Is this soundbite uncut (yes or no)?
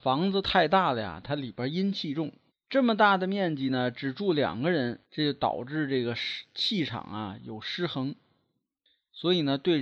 no